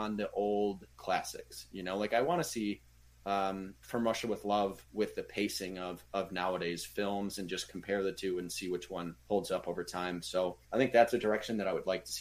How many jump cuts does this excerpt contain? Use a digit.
5